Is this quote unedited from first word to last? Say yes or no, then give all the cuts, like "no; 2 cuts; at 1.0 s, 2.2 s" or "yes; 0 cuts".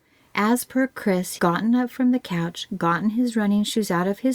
no; 1 cut; at 1.4 s